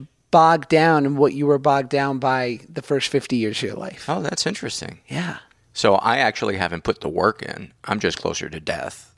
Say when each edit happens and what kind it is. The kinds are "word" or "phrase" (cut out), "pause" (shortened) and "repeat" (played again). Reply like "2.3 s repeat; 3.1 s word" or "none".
none